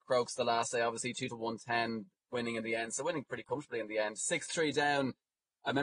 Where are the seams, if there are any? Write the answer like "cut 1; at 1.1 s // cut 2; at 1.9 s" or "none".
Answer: cut 1; at 1.3 s